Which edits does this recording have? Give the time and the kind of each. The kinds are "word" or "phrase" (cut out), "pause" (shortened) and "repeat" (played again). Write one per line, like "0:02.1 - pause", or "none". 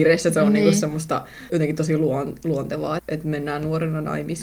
0:01.5 - word
0:03.0 - word